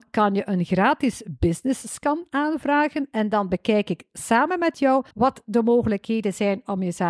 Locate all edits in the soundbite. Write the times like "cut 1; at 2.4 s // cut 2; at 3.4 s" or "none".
cut 1; at 5.1 s